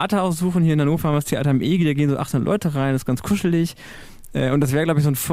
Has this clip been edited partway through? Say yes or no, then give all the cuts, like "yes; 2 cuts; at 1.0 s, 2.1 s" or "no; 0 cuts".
no; 0 cuts